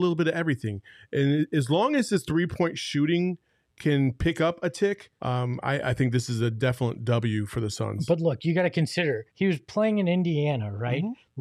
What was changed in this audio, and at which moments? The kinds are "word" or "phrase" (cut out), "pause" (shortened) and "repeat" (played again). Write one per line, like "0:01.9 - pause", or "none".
0:05.2 - pause
0:09.3 - pause